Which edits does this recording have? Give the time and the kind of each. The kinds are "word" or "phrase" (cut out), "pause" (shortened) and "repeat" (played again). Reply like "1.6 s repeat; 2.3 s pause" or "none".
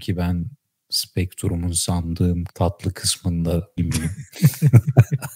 2.5 s word; 3.8 s word